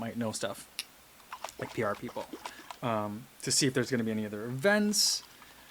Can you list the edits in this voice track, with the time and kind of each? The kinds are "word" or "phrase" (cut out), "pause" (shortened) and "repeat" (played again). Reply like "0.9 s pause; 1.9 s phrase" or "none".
none